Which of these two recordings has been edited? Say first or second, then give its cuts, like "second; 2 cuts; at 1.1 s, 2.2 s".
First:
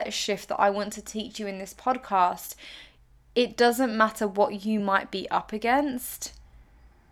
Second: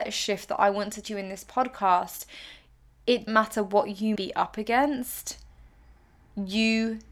second; 3 cuts; at 1.0 s, 3.3 s, 4.2 s